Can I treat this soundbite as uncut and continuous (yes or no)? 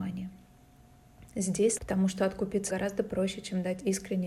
no